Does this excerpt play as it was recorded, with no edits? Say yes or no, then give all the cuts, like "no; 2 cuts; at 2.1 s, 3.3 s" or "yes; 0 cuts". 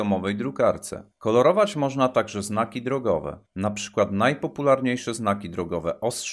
no; 2 cuts; at 1.1 s, 3.5 s